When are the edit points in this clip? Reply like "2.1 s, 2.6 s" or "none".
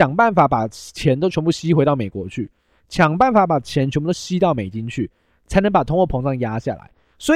none